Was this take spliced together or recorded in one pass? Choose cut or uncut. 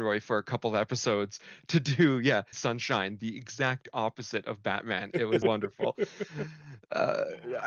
cut